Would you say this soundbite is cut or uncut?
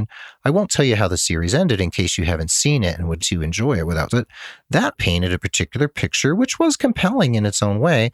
cut